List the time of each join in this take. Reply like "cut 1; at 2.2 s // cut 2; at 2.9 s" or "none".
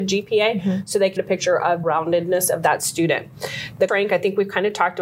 cut 1; at 1.2 s // cut 2; at 1.8 s // cut 3; at 3.9 s